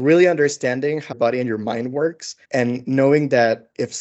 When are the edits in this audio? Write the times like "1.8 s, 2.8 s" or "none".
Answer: 1.1 s, 2.4 s